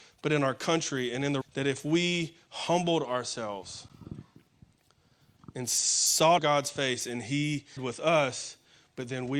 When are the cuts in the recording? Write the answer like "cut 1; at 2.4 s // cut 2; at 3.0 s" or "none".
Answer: cut 1; at 1.4 s // cut 2; at 6.4 s // cut 3; at 7.8 s